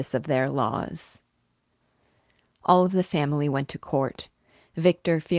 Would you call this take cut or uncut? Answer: uncut